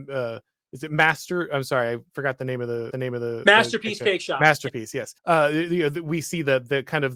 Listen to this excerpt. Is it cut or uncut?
cut